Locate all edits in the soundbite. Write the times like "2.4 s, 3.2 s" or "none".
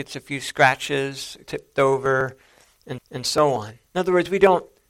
1.4 s, 3.0 s, 3.9 s